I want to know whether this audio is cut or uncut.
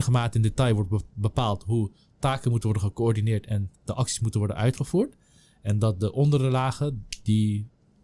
uncut